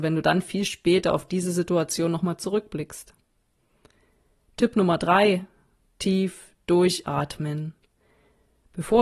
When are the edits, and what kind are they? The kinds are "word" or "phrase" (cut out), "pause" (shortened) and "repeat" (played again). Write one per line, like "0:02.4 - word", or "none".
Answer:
none